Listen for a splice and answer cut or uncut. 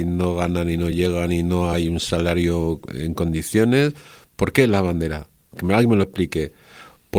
uncut